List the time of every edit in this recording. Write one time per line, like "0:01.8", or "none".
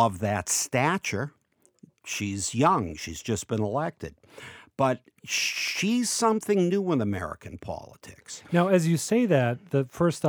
none